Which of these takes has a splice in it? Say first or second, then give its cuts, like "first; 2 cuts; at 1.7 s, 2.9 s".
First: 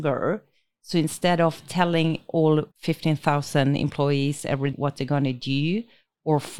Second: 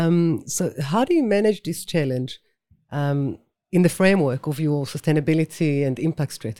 first; 2 cuts; at 2.7 s, 4.7 s